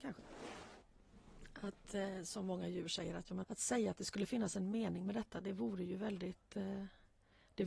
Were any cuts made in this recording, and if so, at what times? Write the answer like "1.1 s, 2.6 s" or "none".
3.4 s